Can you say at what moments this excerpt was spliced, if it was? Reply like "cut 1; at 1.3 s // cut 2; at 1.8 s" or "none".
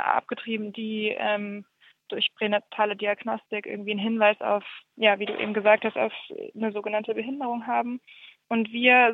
none